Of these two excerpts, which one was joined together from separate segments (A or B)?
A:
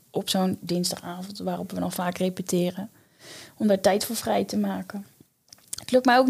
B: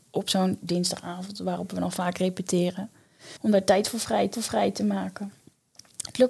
B